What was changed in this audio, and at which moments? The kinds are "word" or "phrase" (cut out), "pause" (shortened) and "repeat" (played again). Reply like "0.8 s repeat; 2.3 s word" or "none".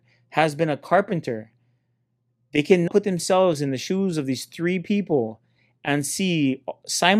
2.9 s word

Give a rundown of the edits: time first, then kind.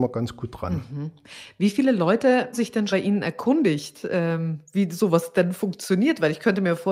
2.5 s word; 2.9 s word

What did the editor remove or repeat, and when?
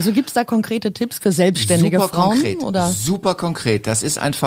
1.2 s word

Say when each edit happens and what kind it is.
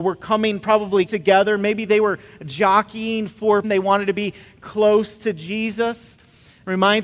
1.1 s word; 3.6 s word

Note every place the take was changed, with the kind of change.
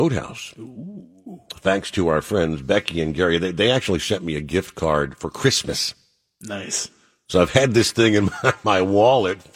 none

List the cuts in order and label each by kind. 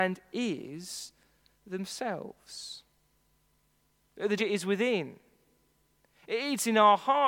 4.4 s word

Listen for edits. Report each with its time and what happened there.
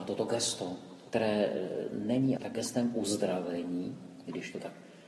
2.4 s word

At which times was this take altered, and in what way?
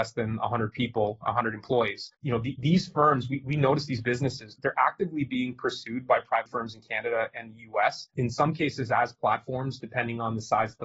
2.1 s pause; 4.6 s word; 6.5 s word; 8.1 s pause

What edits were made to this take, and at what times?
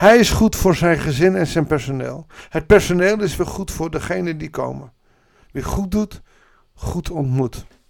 none

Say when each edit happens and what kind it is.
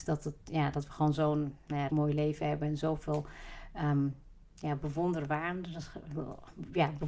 1.9 s word

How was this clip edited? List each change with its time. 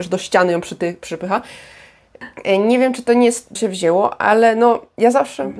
3.6 s word

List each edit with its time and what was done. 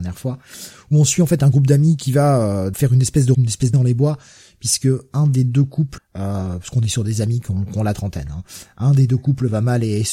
2.7 s word; 3.3 s word; 3.7 s word; 6.0 s word

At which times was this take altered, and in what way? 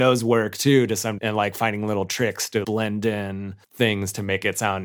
1.2 s word; 2.6 s word; 3.6 s pause

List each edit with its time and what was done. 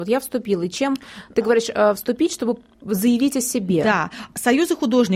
none

